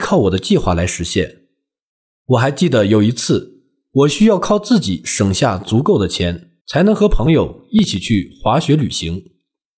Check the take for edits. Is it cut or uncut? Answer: cut